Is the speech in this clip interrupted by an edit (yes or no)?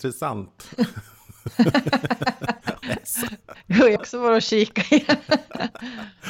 yes